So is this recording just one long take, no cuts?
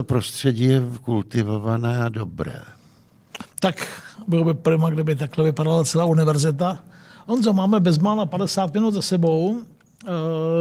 yes; 0 cuts

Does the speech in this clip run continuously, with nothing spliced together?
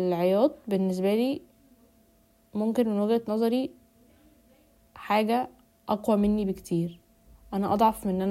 yes; 0 cuts

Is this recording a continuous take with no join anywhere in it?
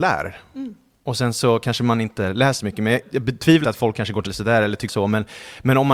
no; 5 cuts; at 2.6 s, 3.0 s, 3.6 s, 4.3 s, 4.9 s

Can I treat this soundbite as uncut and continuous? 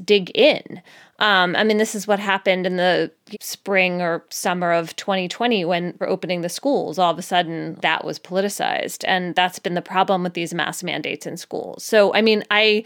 no; 3 cuts; at 3.3 s, 6.0 s, 7.8 s

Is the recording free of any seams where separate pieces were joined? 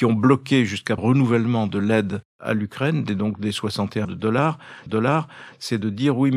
no; 3 cuts; at 1.0 s, 4.0 s, 4.9 s

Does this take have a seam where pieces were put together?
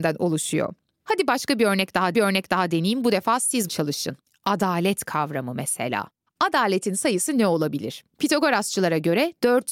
yes; 5 cuts; at 2.1 s, 3.7 s, 4.2 s, 6.3 s, 8.1 s

